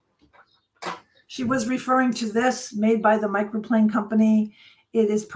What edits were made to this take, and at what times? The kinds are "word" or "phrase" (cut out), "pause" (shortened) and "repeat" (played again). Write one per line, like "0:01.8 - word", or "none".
none